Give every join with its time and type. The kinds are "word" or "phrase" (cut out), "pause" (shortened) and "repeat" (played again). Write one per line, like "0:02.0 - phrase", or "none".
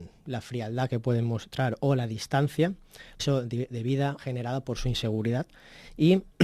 0:03.2 - word
0:04.2 - word

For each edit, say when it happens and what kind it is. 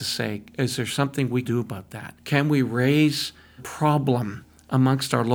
0:01.4 - word
0:02.2 - pause
0:03.6 - word

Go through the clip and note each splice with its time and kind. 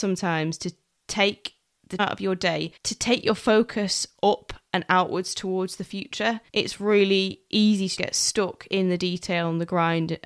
0:02.0 - word
0:02.8 - pause
0:06.5 - pause
0:08.0 - word

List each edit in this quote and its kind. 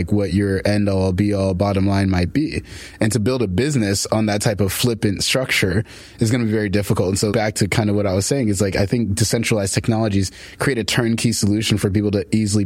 0:07.3 - word

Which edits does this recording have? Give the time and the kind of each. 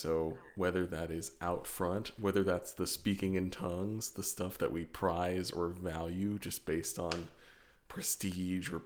none

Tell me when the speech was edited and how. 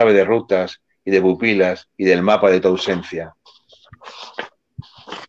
0:01.9 - pause

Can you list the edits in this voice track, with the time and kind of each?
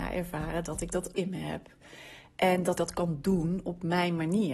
0:01.1 - word
0:02.8 - word

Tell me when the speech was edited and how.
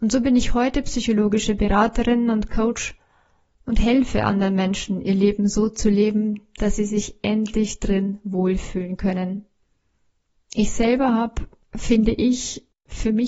none

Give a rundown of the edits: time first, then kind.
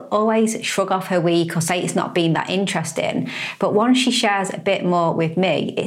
none

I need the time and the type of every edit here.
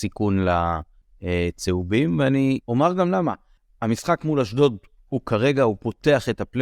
0:02.6 - pause

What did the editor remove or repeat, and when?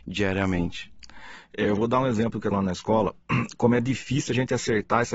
0:02.5 - word

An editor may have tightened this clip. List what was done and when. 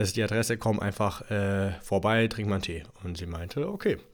none

